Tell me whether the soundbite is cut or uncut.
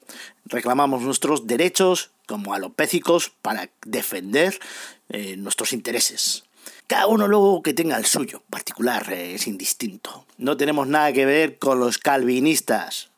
cut